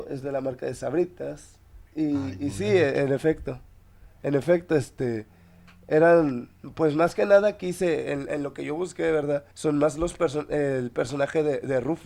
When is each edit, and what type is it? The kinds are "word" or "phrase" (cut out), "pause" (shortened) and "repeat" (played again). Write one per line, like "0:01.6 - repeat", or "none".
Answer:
0:01.9 - pause
0:09.5 - pause